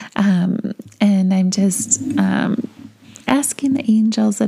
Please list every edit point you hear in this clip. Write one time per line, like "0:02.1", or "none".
none